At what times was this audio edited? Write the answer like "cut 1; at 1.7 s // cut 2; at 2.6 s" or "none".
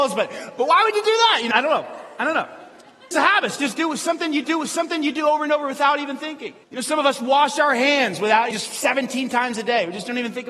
cut 1; at 1.5 s // cut 2; at 3.1 s // cut 3; at 4.4 s // cut 4; at 6.6 s // cut 5; at 8.5 s